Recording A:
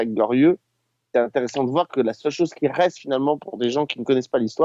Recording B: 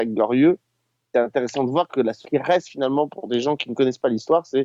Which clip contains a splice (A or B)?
B